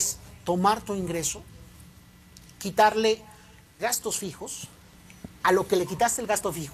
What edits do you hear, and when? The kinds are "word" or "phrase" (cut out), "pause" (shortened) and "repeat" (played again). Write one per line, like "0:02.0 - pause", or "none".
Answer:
0:03.8 - word
0:05.4 - word